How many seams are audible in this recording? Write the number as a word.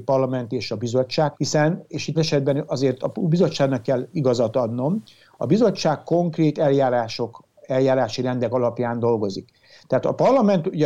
two